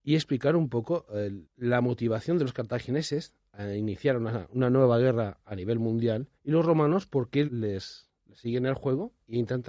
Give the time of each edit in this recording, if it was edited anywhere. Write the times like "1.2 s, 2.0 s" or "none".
1.4 s, 6.3 s, 7.5 s